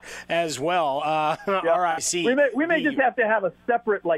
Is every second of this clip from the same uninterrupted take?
yes; 0 cuts

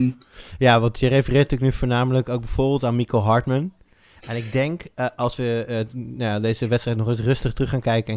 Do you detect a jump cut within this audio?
no; 0 cuts

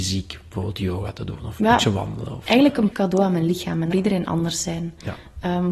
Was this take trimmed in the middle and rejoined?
yes; 2 cuts; at 2.9 s, 3.9 s

